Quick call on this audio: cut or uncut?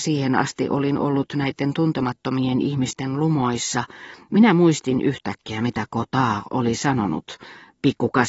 uncut